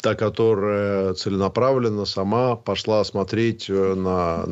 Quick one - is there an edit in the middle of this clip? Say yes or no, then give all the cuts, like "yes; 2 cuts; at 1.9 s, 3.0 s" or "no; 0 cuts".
no; 0 cuts